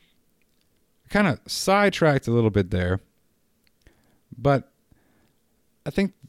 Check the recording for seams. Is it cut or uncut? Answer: uncut